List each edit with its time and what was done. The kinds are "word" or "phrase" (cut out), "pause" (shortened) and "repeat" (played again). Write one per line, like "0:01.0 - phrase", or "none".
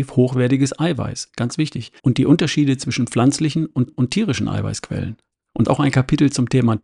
0:02.0 - pause
0:03.9 - repeat
0:05.6 - phrase